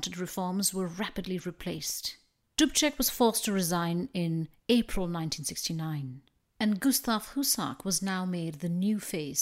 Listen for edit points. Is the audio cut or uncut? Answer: uncut